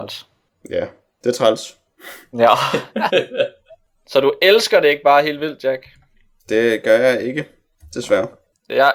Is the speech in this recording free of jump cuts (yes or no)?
yes